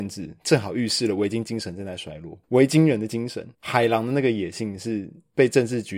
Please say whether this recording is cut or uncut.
cut